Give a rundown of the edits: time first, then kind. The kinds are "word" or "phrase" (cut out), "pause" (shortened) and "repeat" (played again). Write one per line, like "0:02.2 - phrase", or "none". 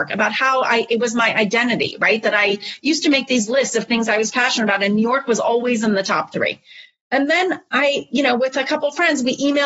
none